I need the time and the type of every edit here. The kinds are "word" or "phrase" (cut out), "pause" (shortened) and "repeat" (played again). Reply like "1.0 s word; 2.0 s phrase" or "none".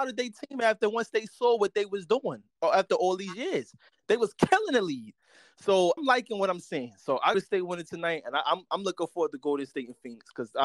2.5 s pause; 6.0 s word; 7.3 s phrase